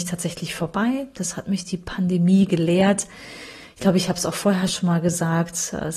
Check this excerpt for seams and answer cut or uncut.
uncut